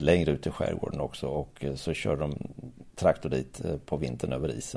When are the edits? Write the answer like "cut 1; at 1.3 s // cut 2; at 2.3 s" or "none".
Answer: none